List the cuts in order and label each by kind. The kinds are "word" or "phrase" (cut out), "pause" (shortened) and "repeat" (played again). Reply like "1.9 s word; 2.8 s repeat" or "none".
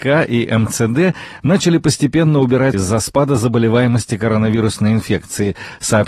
2.7 s word